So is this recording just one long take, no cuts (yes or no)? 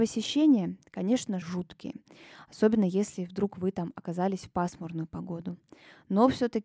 no